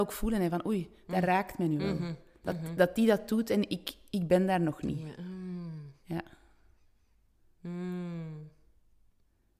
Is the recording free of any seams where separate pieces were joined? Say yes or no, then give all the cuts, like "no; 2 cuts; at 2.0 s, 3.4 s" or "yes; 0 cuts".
yes; 0 cuts